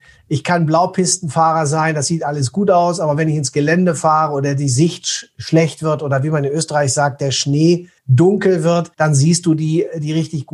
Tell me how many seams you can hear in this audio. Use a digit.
2